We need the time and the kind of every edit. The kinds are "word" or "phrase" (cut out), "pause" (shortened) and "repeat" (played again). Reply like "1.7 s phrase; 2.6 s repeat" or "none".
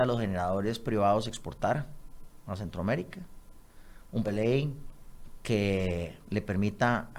4.2 s word